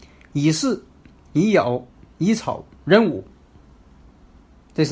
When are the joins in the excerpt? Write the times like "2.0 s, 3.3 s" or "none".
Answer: none